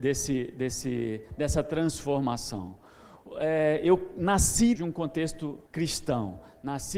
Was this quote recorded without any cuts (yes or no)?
no